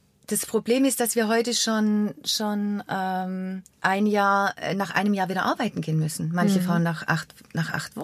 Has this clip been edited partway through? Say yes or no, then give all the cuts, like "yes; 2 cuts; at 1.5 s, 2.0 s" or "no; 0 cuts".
yes; 1 cut; at 3.7 s